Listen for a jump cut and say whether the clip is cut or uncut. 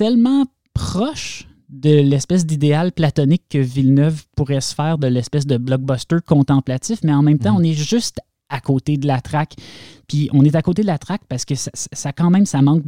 uncut